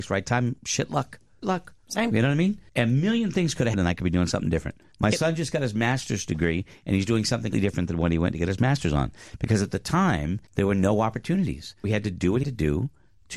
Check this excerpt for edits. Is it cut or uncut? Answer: cut